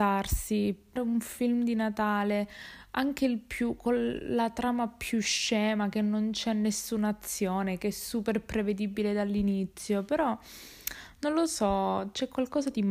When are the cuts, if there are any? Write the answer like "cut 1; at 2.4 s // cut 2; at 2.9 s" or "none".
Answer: cut 1; at 1.0 s